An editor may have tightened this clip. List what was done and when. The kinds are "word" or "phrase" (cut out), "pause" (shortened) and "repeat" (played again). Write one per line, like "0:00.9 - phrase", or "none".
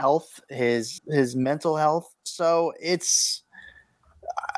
0:01.0 - word